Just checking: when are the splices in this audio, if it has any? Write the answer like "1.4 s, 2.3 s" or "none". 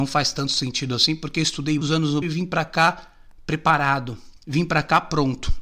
1.8 s, 2.2 s, 4.4 s